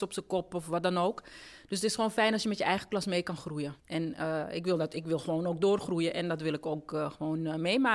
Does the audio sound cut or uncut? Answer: cut